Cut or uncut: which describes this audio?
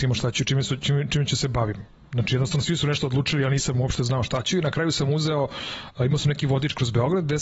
uncut